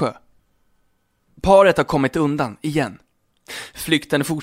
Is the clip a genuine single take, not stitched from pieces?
yes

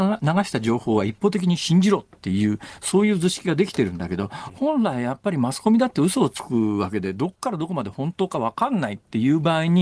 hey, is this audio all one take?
yes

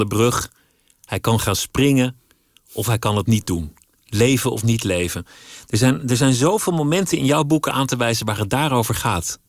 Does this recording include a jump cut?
no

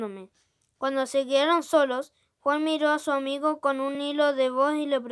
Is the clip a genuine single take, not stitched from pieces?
yes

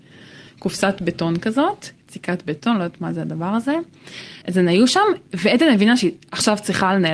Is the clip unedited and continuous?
no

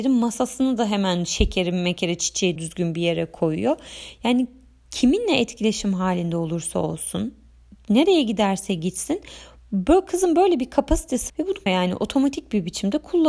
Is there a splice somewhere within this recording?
yes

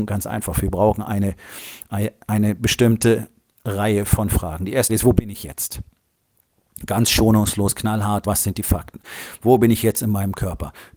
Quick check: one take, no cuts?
no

